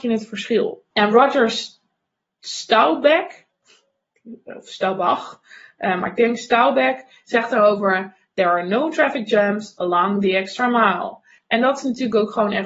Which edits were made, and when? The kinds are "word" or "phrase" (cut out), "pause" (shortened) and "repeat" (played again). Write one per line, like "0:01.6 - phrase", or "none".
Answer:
none